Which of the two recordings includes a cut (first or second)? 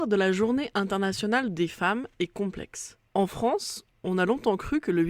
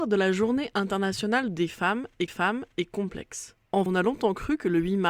second